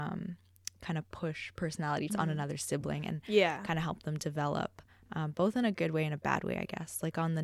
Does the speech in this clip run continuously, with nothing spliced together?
no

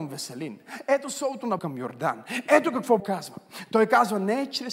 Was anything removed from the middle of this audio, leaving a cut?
yes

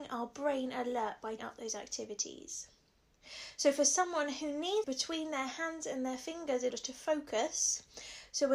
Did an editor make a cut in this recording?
yes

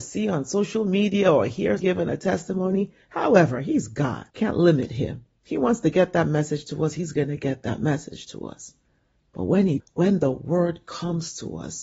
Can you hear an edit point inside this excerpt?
yes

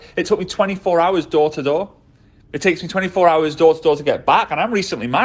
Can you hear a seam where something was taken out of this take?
no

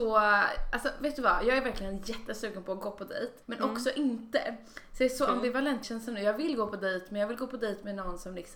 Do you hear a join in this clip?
yes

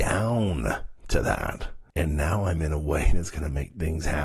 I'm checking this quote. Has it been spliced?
yes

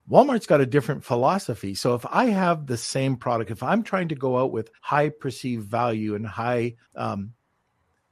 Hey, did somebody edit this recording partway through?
yes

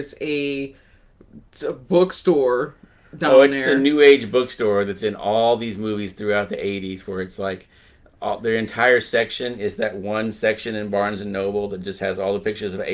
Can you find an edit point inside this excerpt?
no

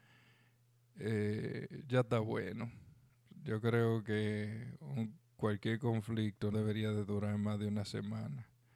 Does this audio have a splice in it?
yes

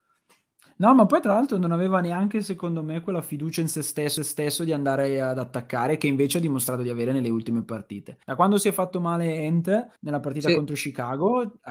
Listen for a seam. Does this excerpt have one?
yes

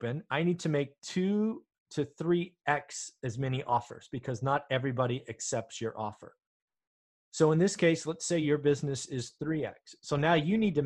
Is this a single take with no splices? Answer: yes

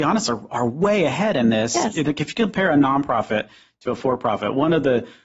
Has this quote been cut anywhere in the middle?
no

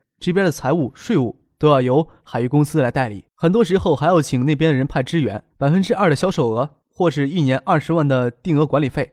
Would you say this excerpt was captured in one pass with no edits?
no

